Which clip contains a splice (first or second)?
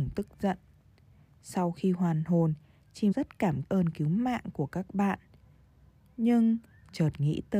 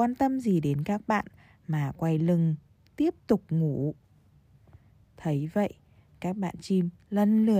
first